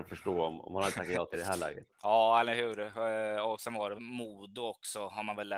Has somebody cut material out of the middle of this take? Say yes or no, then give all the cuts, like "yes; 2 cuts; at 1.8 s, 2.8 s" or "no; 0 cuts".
yes; 3 cuts; at 1.3 s, 1.9 s, 4.0 s